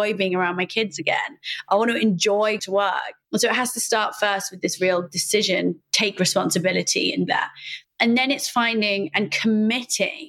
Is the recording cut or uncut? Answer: cut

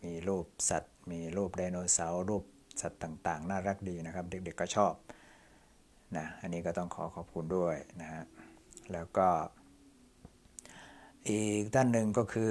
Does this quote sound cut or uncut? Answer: uncut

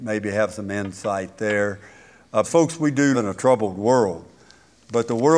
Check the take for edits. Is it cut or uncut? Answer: cut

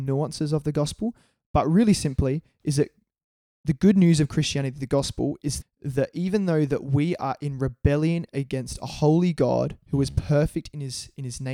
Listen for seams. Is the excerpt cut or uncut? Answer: cut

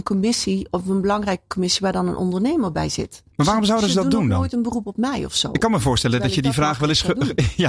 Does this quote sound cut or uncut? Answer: cut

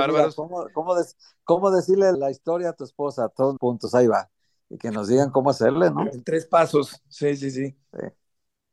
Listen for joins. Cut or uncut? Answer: cut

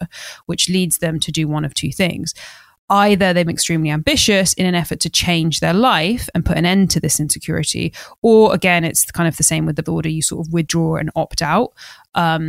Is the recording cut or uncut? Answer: cut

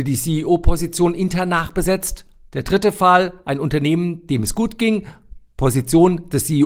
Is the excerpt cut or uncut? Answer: uncut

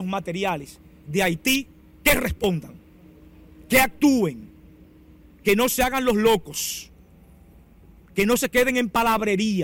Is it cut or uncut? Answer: uncut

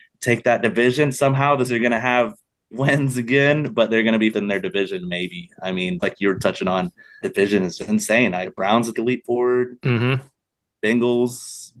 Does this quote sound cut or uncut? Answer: cut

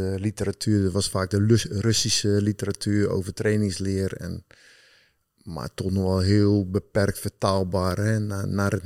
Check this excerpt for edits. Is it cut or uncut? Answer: uncut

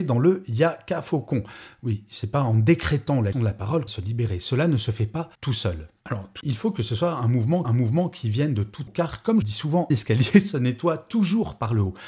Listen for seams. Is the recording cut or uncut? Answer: cut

